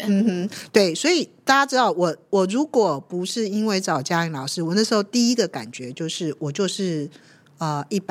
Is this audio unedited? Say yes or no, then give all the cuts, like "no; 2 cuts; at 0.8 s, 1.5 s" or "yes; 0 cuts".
yes; 0 cuts